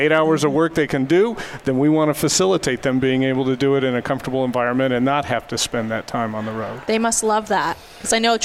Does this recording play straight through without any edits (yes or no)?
yes